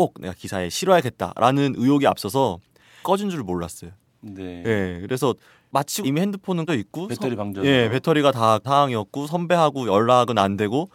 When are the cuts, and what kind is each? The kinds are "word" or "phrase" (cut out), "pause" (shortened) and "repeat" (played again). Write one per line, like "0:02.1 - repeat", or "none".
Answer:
0:03.0 - word
0:06.0 - word
0:06.7 - word
0:08.6 - word